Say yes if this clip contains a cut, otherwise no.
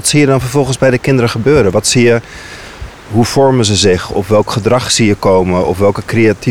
no